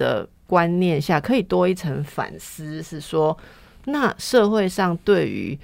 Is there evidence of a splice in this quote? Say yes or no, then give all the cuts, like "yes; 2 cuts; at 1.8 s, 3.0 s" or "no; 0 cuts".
no; 0 cuts